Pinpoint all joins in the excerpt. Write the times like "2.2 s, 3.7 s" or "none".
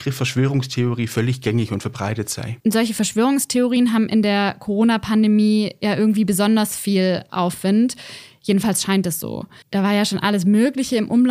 2.6 s, 9.6 s